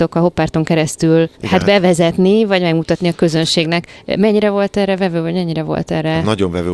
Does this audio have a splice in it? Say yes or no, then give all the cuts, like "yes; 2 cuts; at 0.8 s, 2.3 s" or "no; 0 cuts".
yes; 1 cut; at 1.3 s